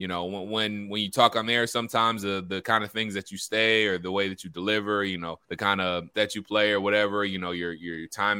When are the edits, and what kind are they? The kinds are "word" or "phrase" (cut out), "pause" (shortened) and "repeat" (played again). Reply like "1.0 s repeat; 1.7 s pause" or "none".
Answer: 5.4 s pause; 6.1 s word